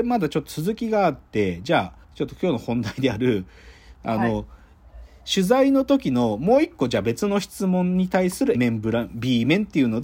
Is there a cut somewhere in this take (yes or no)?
yes